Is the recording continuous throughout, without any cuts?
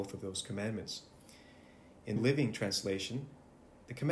no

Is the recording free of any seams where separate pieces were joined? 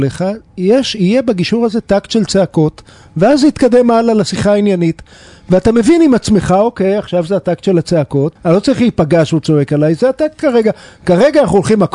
no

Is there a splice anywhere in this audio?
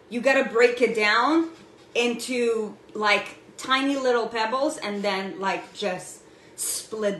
no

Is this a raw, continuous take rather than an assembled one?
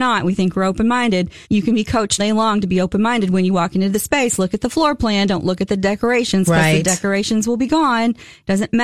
no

